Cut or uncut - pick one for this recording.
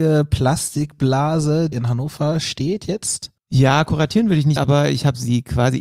cut